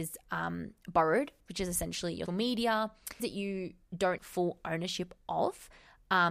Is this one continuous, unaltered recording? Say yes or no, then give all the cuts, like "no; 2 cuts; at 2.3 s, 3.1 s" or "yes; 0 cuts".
no; 4 cuts; at 1.5 s, 2.3 s, 3.2 s, 4.2 s